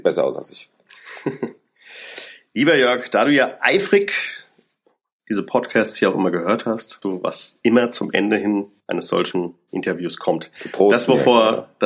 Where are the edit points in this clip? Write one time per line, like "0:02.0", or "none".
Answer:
0:07.0
0:08.8

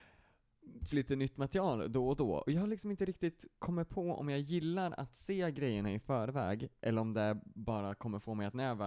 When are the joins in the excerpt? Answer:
0:00.9

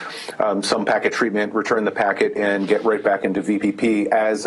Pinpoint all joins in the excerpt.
none

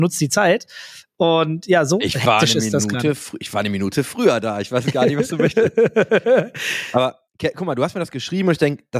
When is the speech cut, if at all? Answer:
0:07.3

